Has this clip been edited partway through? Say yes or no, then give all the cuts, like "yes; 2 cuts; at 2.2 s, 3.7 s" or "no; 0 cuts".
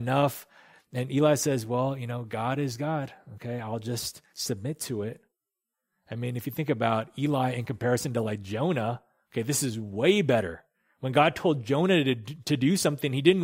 no; 0 cuts